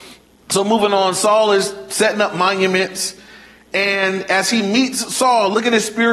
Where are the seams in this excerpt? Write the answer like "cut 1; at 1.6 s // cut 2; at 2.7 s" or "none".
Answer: none